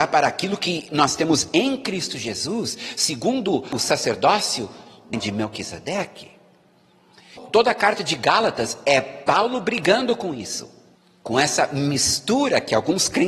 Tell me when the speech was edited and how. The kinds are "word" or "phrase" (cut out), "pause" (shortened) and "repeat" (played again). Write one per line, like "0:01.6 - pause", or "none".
0:11.0 - pause